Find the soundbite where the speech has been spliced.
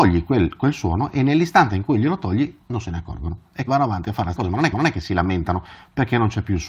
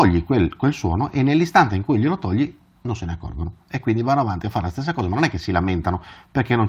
first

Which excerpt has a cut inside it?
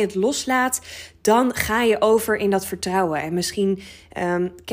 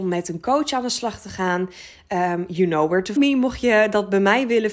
second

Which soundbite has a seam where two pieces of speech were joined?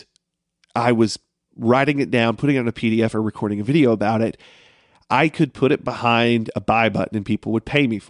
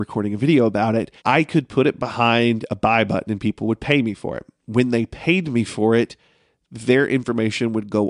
second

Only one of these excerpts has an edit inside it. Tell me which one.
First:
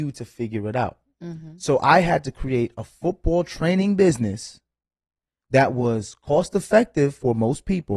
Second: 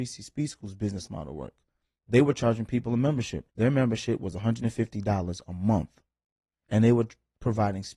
second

